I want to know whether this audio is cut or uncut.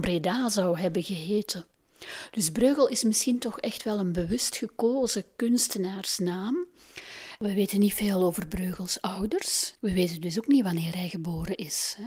uncut